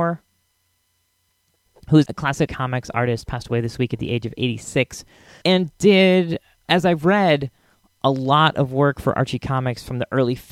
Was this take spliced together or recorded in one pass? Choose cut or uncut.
cut